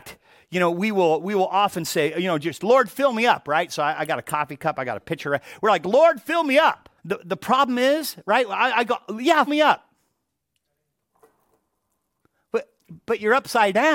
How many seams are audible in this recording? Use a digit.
2